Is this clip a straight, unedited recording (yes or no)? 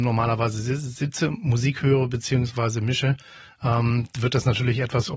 yes